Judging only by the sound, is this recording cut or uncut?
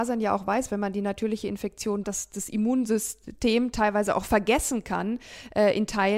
cut